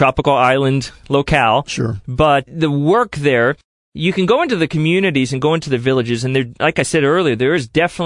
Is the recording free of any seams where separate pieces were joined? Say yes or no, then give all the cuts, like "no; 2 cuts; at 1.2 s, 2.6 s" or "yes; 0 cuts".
yes; 0 cuts